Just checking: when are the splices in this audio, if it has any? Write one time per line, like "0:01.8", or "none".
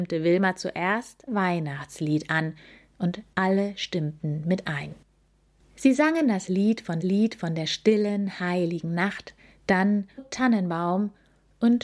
0:01.3
0:07.0
0:10.2